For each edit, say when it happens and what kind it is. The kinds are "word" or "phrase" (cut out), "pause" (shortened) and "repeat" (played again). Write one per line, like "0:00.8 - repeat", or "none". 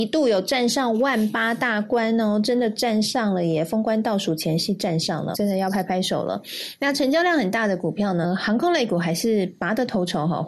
0:05.3 - word
0:08.2 - phrase